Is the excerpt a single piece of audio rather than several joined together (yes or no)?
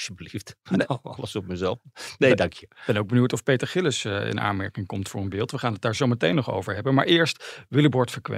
yes